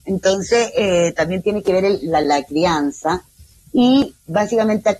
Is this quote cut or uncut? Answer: uncut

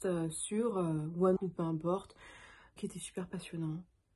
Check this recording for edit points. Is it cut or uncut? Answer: cut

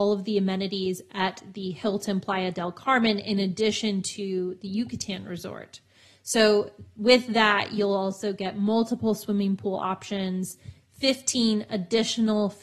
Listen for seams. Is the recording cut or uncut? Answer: uncut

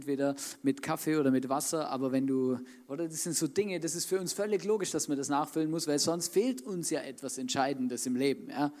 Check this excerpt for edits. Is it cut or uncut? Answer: uncut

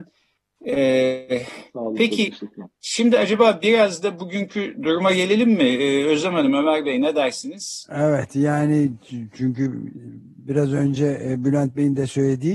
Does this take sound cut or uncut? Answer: cut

